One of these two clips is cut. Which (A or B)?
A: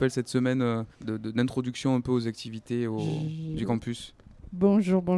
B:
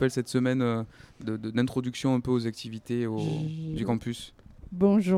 A